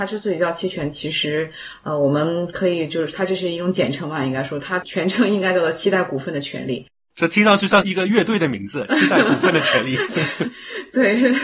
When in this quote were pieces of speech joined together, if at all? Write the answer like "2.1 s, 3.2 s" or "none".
10.1 s